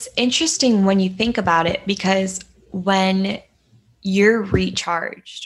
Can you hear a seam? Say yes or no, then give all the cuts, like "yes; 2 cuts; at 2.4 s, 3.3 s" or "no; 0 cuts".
no; 0 cuts